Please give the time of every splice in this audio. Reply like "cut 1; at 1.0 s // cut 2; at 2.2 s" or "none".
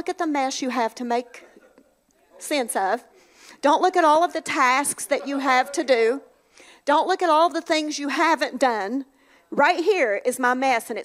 none